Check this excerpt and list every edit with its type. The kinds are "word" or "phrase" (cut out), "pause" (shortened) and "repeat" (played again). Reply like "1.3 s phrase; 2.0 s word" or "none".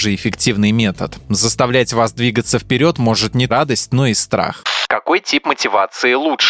3.5 s word